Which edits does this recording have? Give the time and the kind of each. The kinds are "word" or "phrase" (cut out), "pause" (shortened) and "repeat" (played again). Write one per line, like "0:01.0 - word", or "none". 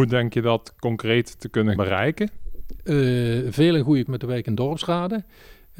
0:01.8 - word
0:04.1 - word